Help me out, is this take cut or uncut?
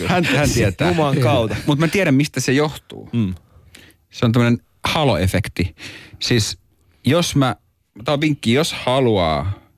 uncut